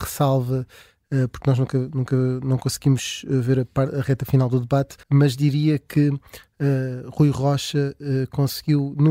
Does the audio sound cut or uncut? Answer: cut